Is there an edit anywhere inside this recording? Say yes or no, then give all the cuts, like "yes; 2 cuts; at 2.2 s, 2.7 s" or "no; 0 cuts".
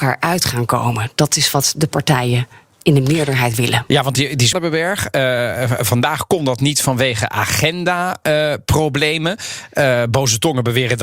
yes; 1 cut; at 4.5 s